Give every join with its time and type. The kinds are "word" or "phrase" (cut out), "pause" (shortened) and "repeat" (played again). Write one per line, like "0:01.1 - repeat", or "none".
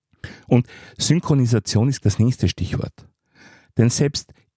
0:02.0 - word